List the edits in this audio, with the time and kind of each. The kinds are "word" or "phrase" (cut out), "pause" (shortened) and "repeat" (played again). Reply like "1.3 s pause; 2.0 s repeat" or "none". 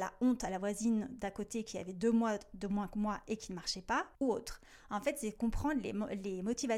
4.1 s pause

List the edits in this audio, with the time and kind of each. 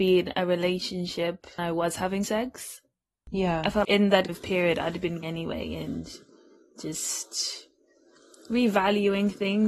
1.6 s word; 2.2 s word; 3.8 s word; 4.3 s word; 5.2 s word

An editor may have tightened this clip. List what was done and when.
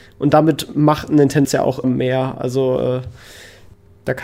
1.4 s word; 1.8 s word

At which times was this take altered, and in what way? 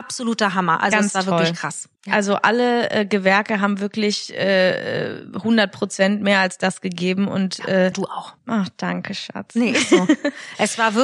2.0 s pause; 7.9 s word; 8.4 s pause

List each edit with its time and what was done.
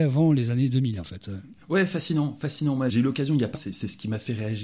1.6 s pause; 2.9 s word; 3.5 s word

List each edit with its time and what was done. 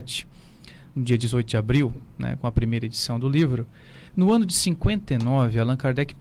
4.1 s pause

